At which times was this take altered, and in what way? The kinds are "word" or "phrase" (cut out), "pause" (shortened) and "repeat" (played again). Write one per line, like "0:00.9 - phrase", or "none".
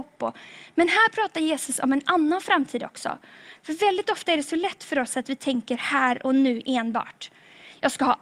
none